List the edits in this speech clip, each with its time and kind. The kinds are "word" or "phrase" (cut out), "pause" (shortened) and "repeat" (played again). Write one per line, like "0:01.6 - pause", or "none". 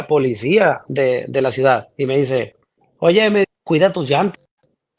0:03.4 - word